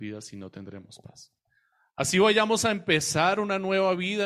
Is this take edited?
no; 0 cuts

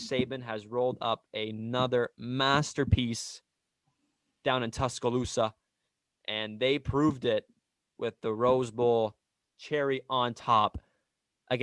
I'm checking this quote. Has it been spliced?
no; 0 cuts

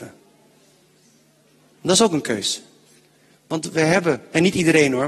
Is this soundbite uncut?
yes; 0 cuts

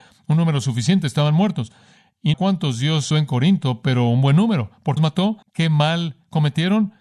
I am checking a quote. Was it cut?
yes; 4 cuts; at 2.3 s, 3.1 s, 5.0 s, 5.4 s

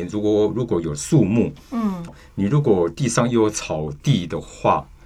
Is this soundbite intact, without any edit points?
no; 1 cut; at 2.1 s

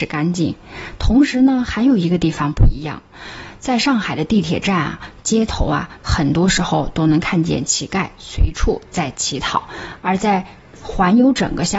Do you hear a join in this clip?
no; 0 cuts

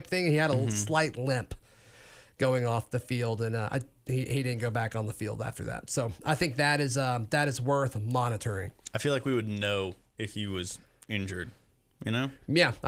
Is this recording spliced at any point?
no; 0 cuts

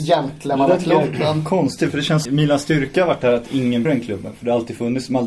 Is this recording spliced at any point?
yes; 2 cuts; at 2.3 s, 3.9 s

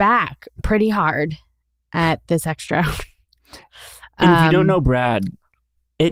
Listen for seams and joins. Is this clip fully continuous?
yes; 0 cuts

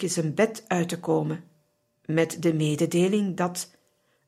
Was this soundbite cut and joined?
no; 0 cuts

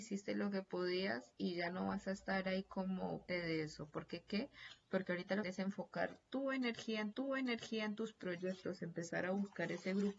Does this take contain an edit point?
yes; 3 cuts; at 3.3 s, 5.4 s, 7.1 s

